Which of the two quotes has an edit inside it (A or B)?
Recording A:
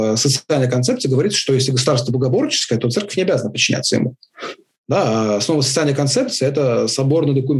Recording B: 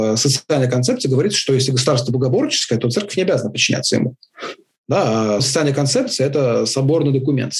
B